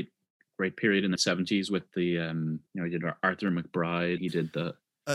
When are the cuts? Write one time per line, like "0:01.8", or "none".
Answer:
0:01.2
0:02.7
0:04.2